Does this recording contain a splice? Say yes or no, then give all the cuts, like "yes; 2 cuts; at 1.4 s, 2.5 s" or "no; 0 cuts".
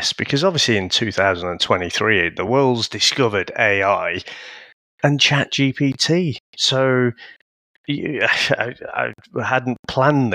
no; 0 cuts